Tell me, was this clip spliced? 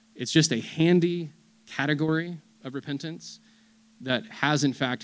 no; 0 cuts

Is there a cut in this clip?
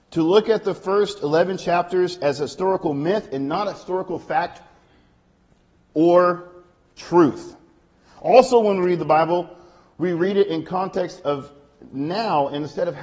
no; 0 cuts

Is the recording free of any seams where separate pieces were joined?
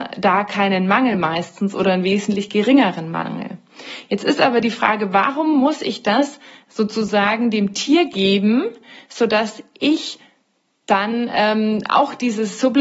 yes; 0 cuts

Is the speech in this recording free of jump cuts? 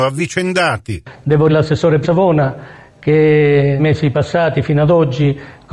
no; 3 cuts; at 1.5 s, 2.0 s, 3.8 s

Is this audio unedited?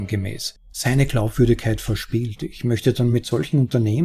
yes; 0 cuts

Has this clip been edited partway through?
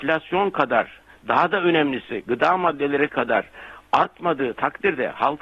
yes; 1 cut; at 3.1 s

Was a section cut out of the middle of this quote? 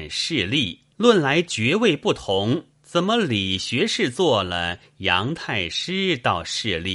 yes; 2 cuts; at 0.9 s, 2.7 s

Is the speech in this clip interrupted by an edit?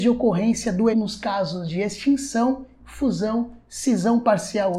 yes; 2 cuts; at 0.9 s, 2.8 s

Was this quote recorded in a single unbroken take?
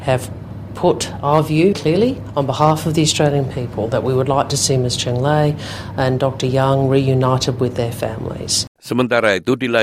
no; 2 cuts; at 1.7 s, 8.8 s

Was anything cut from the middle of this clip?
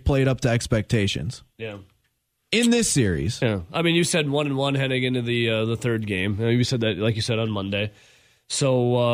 no; 0 cuts

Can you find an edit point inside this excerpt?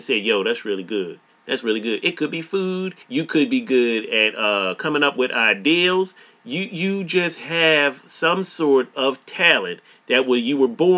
yes; 1 cut; at 3.0 s

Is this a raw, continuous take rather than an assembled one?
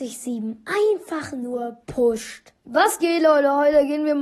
no; 1 cut; at 2.6 s

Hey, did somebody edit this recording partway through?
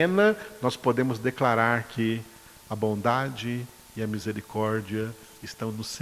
no; 0 cuts

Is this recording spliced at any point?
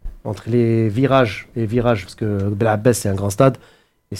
yes; 2 cuts; at 1.5 s, 2.1 s

